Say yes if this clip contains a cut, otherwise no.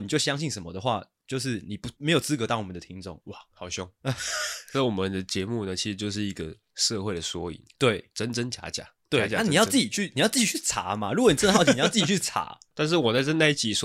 no